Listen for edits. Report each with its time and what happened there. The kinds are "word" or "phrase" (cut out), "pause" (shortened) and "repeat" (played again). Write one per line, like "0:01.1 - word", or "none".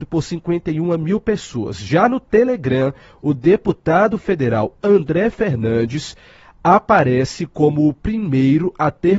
none